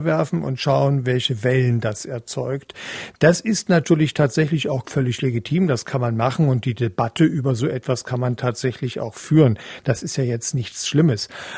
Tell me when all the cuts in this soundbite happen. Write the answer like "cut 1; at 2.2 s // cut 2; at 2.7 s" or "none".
none